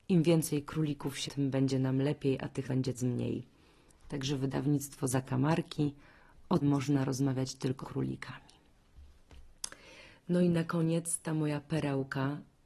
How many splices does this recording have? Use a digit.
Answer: 5